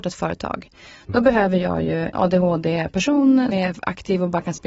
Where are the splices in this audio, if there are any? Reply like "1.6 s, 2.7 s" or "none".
2.1 s, 3.5 s